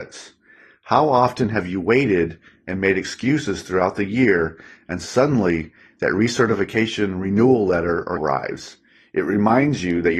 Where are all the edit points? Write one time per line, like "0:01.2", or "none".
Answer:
0:08.2